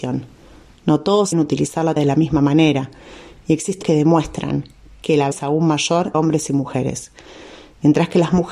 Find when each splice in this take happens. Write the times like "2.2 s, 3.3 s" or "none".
1.3 s, 2.0 s, 3.8 s, 5.3 s, 6.1 s